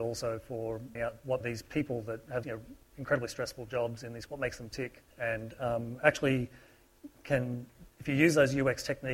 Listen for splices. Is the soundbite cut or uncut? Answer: cut